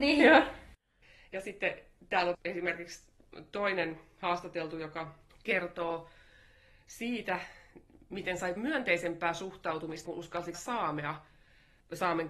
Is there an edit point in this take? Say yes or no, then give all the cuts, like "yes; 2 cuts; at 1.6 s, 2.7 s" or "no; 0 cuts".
yes; 5 cuts; at 2.3 s, 5.3 s, 8.6 s, 10.0 s, 10.5 s